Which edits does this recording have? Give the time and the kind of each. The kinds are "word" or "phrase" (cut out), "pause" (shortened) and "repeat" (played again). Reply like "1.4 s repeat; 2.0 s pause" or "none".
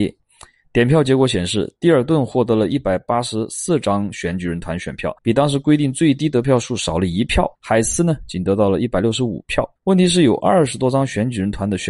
5.2 s pause; 7.5 s pause; 9.8 s pause